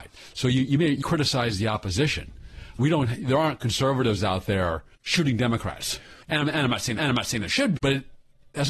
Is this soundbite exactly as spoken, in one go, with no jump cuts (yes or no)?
no